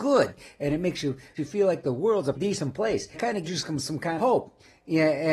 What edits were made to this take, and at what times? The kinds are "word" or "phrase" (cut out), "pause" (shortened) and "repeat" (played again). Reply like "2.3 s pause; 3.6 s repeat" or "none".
1.4 s word; 2.3 s word; 3.1 s word; 3.5 s word; 4.2 s word

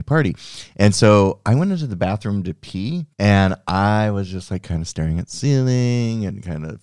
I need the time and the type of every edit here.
3.1 s pause

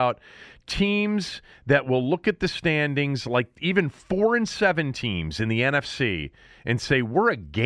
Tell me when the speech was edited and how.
none

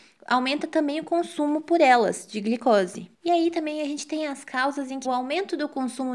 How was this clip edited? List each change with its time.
3.1 s pause; 5.0 s phrase

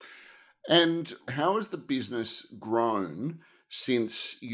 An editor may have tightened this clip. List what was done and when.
none

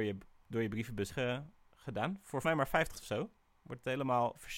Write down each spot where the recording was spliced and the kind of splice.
1.1 s word; 2.4 s word; 2.9 s word

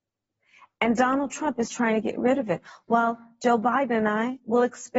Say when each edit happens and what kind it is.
none

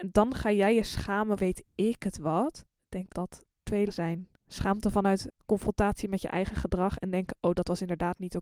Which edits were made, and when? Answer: 1.4 s word; 3.1 s word; 3.9 s word

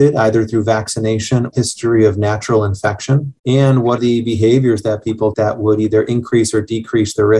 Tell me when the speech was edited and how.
1.5 s phrase; 3.4 s pause; 4.0 s word; 5.3 s word

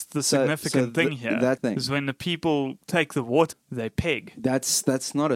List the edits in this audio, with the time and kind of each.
1.6 s word; 3.5 s word

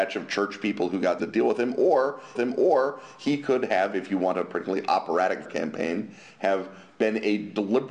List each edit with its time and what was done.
1.2 s phrase; 2.4 s repeat; 5.5 s word

